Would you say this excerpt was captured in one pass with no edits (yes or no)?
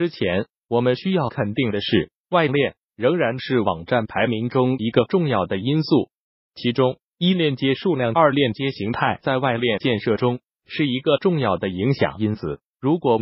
yes